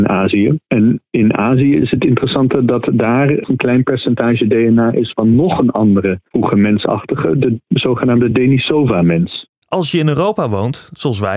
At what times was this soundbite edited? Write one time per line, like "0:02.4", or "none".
none